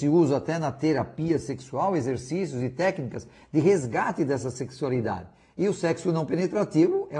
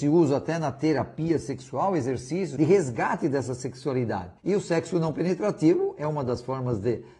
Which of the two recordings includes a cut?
second; 2 cuts; at 2.6 s, 4.4 s

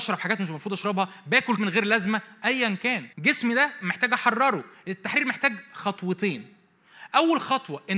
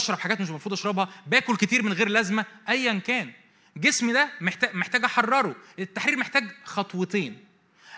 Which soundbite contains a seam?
first; 3 cuts; at 1.6 s, 3.1 s, 3.8 s

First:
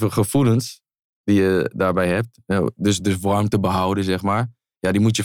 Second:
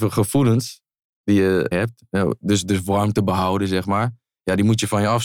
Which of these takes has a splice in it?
second; 1 cut; at 1.7 s

